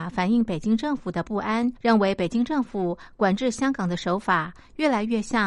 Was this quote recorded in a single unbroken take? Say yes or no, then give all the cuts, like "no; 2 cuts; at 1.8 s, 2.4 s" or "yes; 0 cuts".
no; 1 cut; at 1.8 s